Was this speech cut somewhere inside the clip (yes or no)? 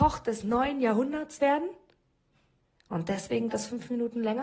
yes